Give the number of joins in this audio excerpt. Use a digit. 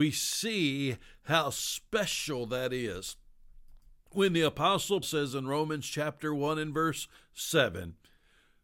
1